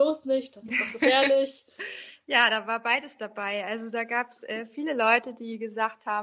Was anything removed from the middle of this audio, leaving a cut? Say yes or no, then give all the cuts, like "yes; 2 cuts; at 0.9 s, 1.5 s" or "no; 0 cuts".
no; 0 cuts